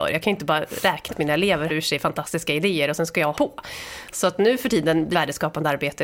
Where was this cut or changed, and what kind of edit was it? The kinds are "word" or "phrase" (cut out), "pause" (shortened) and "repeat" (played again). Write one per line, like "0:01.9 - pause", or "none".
0:01.1 - word
0:01.7 - word
0:03.3 - word
0:05.1 - word